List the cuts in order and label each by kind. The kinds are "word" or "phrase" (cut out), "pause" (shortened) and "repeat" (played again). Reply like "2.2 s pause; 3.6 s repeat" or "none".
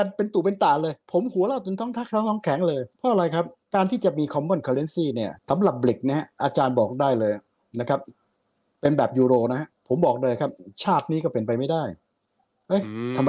1.0 s pause; 2.9 s pause; 3.6 s pause; 5.4 s pause; 9.8 s pause